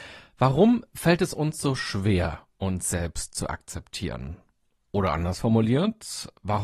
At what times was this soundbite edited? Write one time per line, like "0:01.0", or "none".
none